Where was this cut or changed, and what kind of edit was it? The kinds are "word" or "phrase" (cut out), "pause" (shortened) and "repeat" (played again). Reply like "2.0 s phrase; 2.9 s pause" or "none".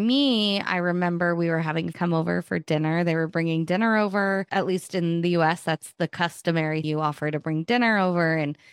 1.9 s word; 6.8 s word

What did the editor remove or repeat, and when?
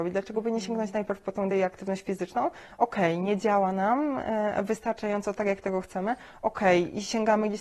1.5 s word

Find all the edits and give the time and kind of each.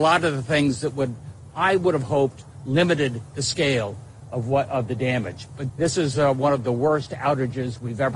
none

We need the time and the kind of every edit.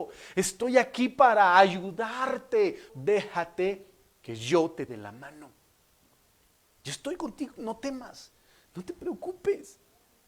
2.9 s word; 4.9 s word; 7.5 s word

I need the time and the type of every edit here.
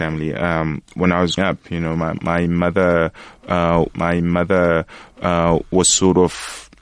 1.4 s word; 3.9 s repeat

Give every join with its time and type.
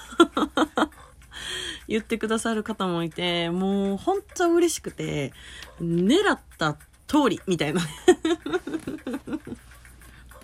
none

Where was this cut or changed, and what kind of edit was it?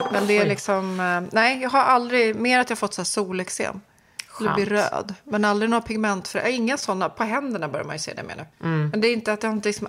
8.5 s pause

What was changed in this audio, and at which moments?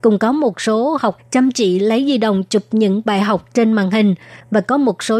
1.2 s word

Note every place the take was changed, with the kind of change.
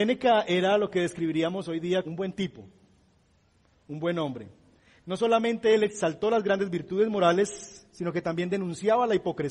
2.0 s word

